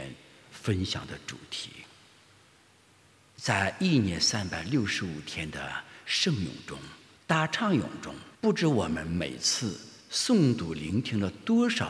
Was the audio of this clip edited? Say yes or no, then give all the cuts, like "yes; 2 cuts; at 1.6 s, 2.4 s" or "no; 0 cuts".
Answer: yes; 3 cuts; at 7.2 s, 8.3 s, 10.0 s